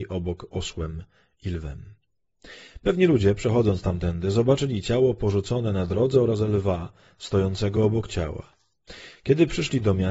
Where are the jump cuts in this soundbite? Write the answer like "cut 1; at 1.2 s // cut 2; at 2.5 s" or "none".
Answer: none